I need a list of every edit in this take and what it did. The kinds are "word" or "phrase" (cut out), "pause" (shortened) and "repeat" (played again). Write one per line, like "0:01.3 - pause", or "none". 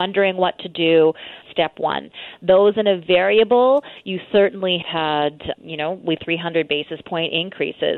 0:01.4 - word
0:04.8 - word
0:05.5 - word
0:06.2 - word